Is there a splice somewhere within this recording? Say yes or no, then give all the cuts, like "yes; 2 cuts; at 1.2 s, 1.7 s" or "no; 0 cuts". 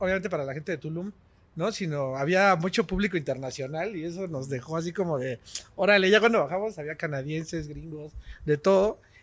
no; 0 cuts